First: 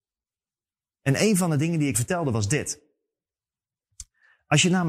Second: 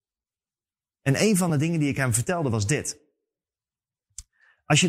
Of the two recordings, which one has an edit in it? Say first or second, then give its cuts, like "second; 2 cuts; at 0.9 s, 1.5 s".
first; 1 cut; at 1.9 s